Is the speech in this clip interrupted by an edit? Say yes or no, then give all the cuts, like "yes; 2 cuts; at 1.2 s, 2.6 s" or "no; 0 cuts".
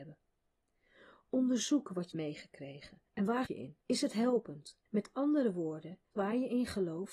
yes; 6 cuts; at 2.1 s, 3.1 s, 3.5 s, 3.8 s, 4.9 s, 6.1 s